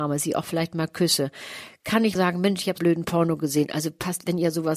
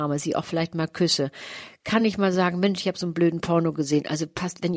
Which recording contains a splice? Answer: first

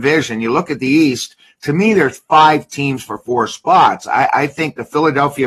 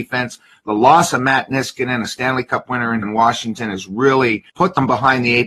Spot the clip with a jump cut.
second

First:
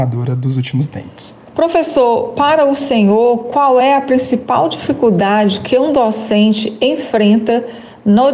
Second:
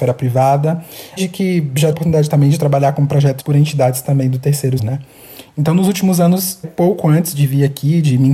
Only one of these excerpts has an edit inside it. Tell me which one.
second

